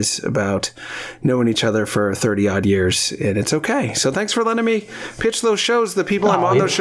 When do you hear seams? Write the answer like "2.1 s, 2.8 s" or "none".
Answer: none